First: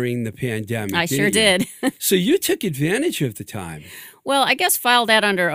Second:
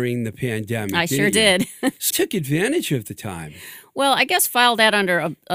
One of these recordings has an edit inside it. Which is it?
second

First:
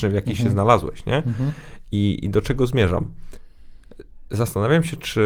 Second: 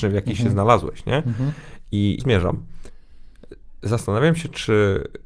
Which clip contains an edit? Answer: second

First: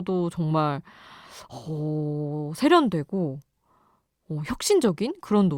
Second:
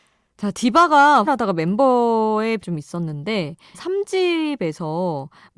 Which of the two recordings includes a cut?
second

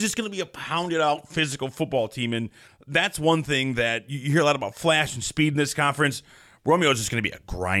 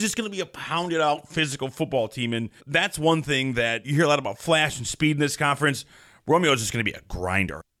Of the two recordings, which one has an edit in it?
second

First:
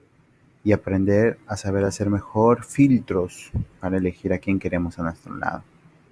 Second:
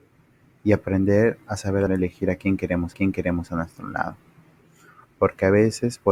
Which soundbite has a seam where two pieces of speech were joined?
second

